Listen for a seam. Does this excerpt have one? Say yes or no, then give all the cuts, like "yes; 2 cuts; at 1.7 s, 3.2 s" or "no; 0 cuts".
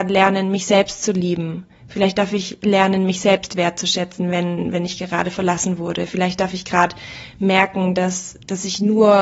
no; 0 cuts